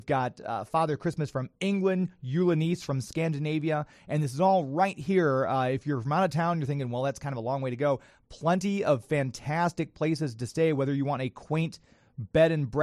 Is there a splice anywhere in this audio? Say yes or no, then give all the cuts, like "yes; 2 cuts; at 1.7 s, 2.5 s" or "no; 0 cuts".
no; 0 cuts